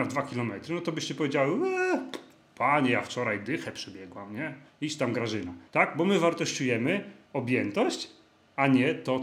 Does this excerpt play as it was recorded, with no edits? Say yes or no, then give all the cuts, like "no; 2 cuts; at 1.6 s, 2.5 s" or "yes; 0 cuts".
no; 3 cuts; at 4.7 s, 5.7 s, 7.3 s